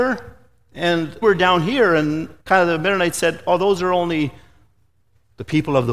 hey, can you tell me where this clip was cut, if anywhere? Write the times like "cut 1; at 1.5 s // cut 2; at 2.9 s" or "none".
cut 1; at 1.2 s // cut 2; at 2.4 s